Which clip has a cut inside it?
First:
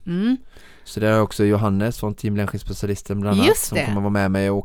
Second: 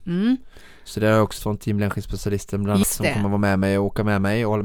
second; 2 cuts; at 1.4 s, 2.8 s

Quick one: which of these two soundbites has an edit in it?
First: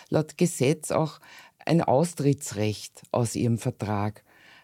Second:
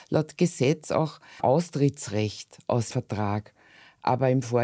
second; 2 cuts; at 1.4 s, 2.9 s

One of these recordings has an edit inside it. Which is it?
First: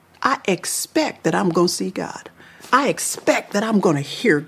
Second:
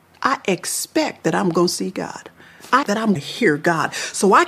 second; 2 cuts; at 2.8 s, 3.2 s

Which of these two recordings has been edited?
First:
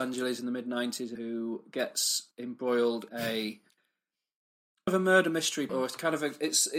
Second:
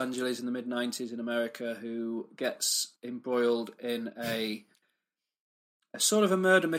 first; 4 cuts; at 1.1 s, 3.1 s, 4.9 s, 5.7 s

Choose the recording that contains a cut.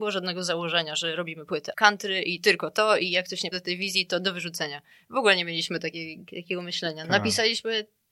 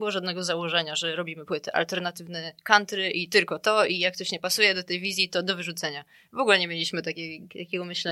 first; 2 cuts; at 1.7 s, 3.5 s

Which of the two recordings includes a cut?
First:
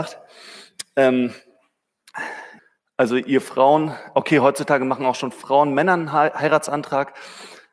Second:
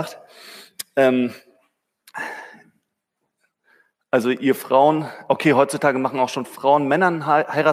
first; 1 cut; at 2.6 s

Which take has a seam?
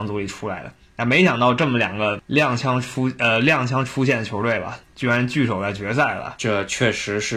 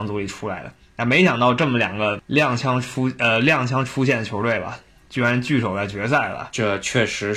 first; 1 cut; at 4.8 s

